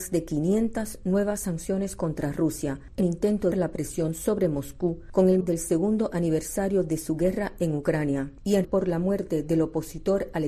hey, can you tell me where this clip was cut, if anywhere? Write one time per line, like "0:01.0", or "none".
0:03.0
0:03.5
0:05.4
0:08.6